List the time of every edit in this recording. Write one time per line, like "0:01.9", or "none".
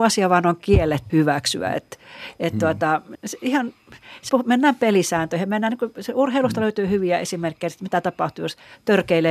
0:01.1
0:03.1
0:04.3